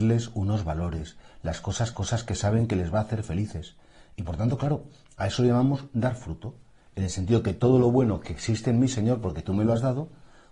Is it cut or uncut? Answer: cut